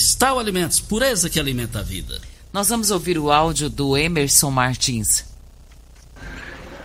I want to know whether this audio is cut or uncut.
uncut